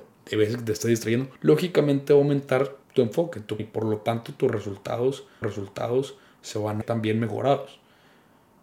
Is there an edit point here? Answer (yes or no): yes